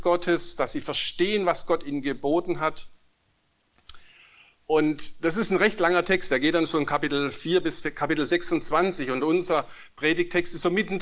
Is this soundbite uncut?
yes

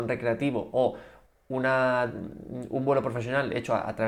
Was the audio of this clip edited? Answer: no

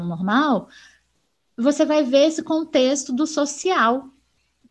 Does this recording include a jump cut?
no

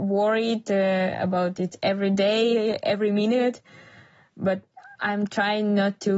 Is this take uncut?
yes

